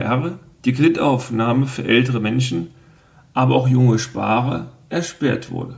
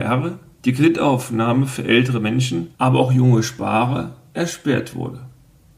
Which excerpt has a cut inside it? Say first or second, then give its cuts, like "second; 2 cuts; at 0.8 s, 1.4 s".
second; 1 cut; at 2.7 s